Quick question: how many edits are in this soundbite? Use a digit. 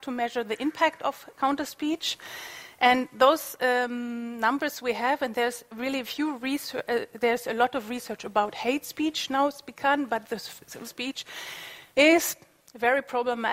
3